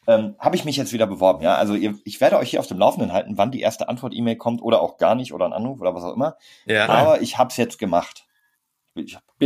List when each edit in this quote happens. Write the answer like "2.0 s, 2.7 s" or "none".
none